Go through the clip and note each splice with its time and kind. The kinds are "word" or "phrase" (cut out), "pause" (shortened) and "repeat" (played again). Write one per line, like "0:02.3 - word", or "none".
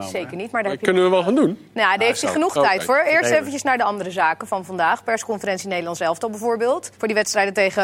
0:06.9 - pause